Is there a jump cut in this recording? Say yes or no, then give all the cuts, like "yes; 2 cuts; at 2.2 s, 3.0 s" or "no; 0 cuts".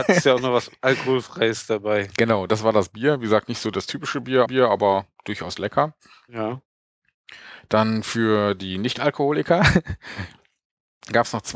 yes; 1 cut; at 4.5 s